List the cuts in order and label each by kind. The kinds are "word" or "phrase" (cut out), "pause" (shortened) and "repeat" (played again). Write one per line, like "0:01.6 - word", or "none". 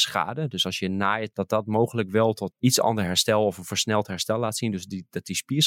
0:01.3 - word
0:02.5 - word